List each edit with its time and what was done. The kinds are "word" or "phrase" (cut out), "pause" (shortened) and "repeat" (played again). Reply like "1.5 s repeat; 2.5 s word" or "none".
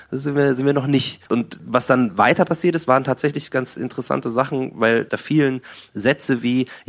1.3 s pause